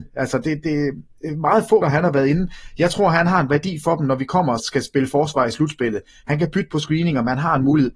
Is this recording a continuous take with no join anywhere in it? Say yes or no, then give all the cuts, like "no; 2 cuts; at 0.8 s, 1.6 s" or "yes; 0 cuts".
no; 2 cuts; at 1.8 s, 4.6 s